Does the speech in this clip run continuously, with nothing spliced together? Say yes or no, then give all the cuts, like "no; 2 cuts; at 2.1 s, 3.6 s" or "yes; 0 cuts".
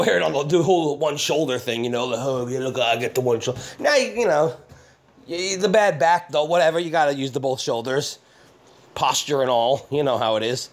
yes; 0 cuts